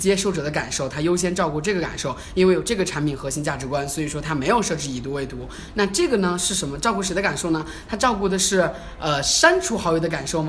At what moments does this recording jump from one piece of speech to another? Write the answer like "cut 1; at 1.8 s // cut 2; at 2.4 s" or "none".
none